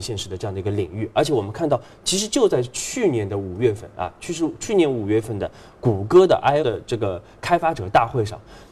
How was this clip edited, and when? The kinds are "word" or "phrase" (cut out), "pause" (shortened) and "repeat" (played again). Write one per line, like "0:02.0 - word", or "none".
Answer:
0:06.6 - word